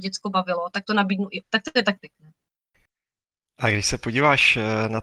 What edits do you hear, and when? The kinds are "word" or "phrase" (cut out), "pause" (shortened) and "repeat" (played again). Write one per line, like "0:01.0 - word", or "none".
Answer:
0:01.4 - word
0:02.0 - word